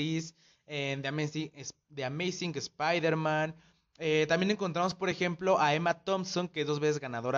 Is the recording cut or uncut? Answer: uncut